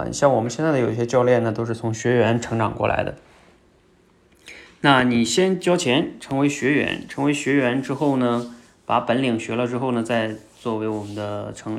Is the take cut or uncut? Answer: uncut